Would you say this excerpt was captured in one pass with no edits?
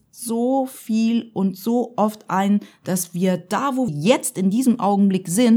no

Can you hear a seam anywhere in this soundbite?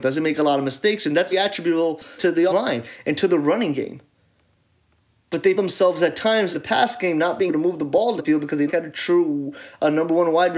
yes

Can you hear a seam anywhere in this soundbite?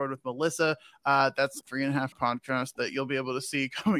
yes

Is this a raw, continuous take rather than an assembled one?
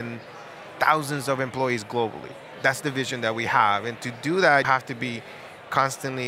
no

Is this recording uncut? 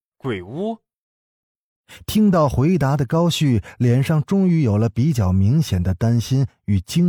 yes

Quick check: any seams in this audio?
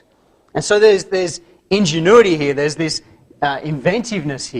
no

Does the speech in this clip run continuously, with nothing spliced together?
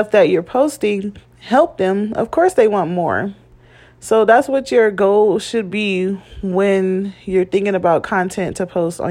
yes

